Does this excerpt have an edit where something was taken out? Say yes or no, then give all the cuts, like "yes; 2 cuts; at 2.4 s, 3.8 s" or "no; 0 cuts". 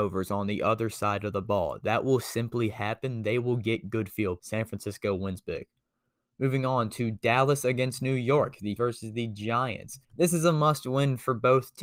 yes; 3 cuts; at 4.4 s, 8.8 s, 10.0 s